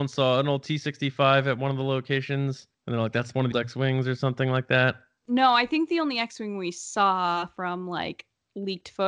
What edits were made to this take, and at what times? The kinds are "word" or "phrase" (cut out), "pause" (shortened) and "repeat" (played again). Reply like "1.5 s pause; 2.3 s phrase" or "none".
2.7 s pause; 3.5 s word